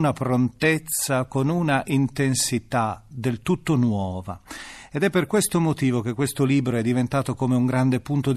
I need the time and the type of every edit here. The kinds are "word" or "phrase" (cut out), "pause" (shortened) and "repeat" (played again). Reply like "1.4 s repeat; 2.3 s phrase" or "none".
none